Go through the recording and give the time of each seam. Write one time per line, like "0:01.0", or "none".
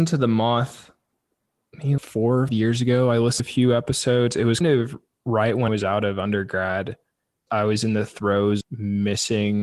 0:02.0
0:02.5
0:03.4
0:04.6
0:05.7
0:07.5
0:08.6